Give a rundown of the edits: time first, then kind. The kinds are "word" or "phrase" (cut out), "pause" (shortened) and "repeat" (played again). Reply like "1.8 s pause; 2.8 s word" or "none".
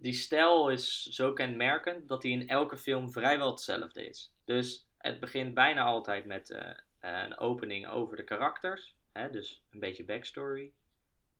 4.4 s pause